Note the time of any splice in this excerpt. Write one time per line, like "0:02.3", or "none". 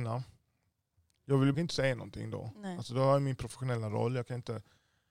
0:01.5